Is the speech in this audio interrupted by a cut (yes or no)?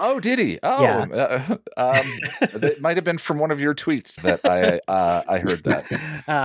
yes